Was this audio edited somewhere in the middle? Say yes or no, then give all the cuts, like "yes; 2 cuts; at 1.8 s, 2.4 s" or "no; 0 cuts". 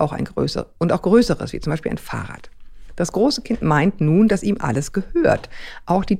no; 0 cuts